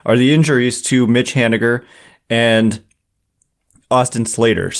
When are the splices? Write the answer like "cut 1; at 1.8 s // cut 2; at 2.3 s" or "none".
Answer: none